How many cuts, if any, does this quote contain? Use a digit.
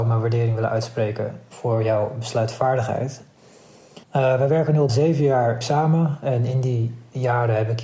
3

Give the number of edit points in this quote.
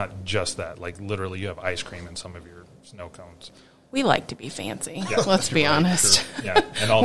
0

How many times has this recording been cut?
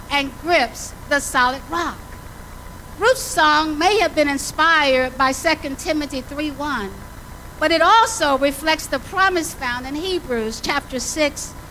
0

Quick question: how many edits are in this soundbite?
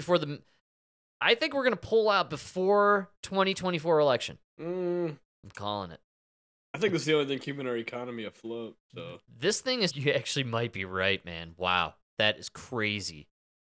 2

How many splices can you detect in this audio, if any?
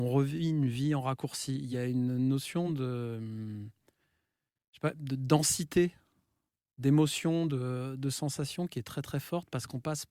0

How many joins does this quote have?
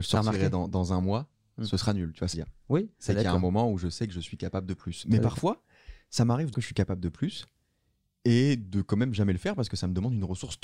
2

